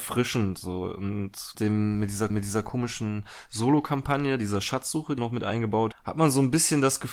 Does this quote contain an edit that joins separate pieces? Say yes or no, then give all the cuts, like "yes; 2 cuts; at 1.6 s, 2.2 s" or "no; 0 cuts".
yes; 4 cuts; at 1.5 s, 2.3 s, 5.2 s, 5.9 s